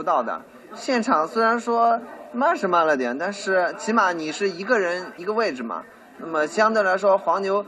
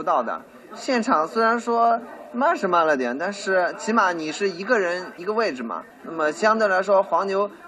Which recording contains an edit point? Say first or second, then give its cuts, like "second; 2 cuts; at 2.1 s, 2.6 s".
second; 1 cut; at 5.9 s